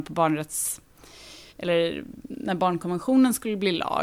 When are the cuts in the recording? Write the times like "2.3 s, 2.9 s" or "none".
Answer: 1.5 s